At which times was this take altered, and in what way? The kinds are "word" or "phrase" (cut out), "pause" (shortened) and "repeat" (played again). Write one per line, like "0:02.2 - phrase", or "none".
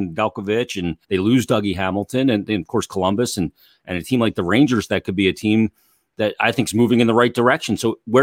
0:01.0 - pause